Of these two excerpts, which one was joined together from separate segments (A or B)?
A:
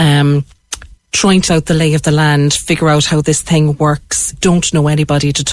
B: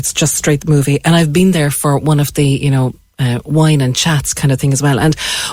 A